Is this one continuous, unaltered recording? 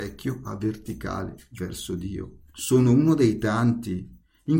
no; 1 cut; at 2.5 s

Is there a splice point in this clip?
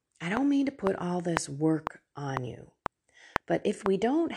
no; 0 cuts

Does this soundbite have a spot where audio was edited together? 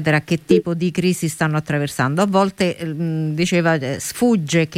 no; 0 cuts

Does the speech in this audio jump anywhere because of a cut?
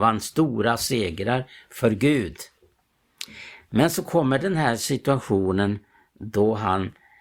no; 0 cuts

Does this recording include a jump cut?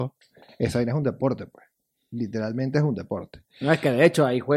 no; 0 cuts

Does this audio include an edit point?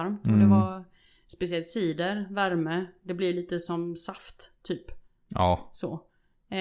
no; 0 cuts

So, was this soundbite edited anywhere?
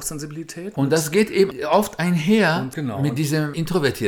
no; 0 cuts

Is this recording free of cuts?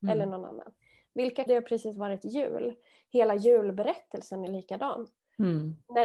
no; 1 cut; at 1.5 s

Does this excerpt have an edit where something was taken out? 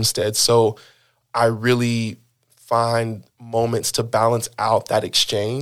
no; 0 cuts

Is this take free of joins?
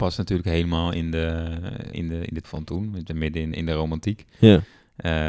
no; 4 cuts; at 1.9 s, 2.4 s, 3.1 s, 3.5 s

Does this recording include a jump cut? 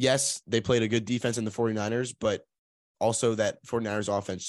no; 0 cuts

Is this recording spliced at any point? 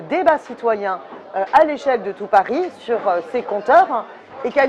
no; 0 cuts

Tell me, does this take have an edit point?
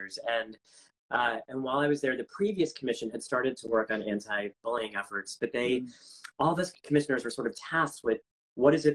no; 0 cuts

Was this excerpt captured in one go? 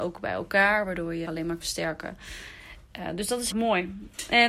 no; 3 cuts; at 1.3 s, 1.6 s, 3.5 s

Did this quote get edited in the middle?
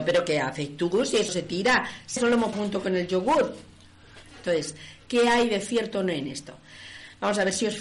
yes; 3 cuts; at 1.3 s, 2.2 s, 2.5 s

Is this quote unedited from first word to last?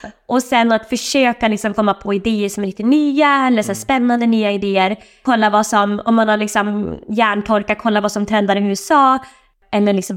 yes; 0 cuts

